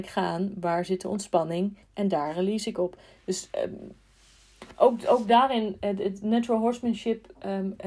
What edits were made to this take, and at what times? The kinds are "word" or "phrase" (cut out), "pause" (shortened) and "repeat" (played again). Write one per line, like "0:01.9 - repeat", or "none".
0:01.8 - pause